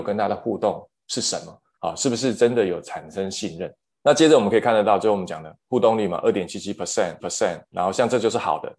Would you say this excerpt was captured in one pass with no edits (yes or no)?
no